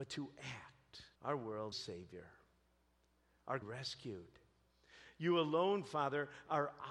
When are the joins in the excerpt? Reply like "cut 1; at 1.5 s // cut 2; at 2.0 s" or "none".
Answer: cut 1; at 1.1 s // cut 2; at 1.7 s // cut 3; at 3.6 s